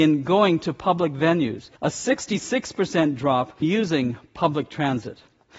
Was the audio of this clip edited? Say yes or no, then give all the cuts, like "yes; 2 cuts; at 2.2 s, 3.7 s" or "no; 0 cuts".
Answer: yes; 2 cuts; at 1.8 s, 3.6 s